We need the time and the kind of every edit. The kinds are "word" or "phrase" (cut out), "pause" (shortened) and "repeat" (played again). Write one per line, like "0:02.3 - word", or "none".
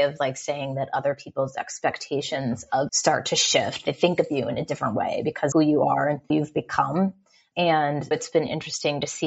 0:02.9 - word
0:05.5 - word
0:06.3 - word
0:08.1 - word